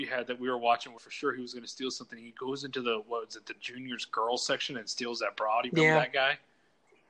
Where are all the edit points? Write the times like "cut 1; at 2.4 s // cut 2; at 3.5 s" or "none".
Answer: cut 1; at 1.0 s

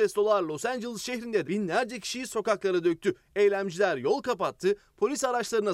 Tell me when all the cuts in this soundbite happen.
cut 1; at 1.4 s

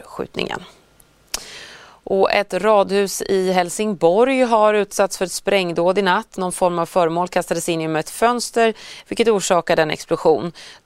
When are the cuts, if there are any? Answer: none

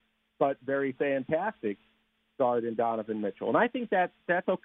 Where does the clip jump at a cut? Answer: none

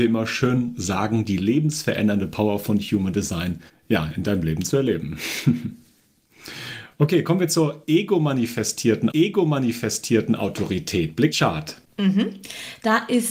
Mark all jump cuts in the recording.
cut 1; at 3.7 s // cut 2; at 9.1 s // cut 3; at 11.3 s

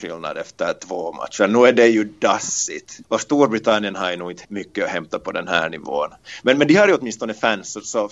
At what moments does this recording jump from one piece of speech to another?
cut 1; at 3.0 s // cut 2; at 4.4 s

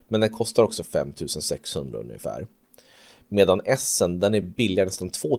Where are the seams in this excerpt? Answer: none

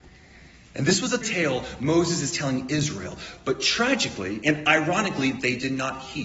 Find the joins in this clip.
cut 1; at 1.2 s

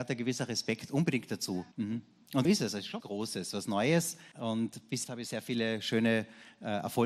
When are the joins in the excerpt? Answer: cut 1; at 1.7 s // cut 2; at 2.4 s // cut 3; at 3.0 s // cut 4; at 4.3 s // cut 5; at 5.0 s

